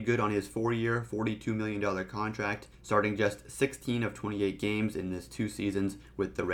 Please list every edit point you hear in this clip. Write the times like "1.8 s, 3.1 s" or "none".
2.7 s